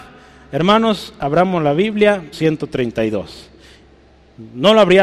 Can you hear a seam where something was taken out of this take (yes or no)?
yes